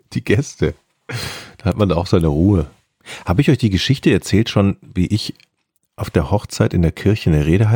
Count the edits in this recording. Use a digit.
0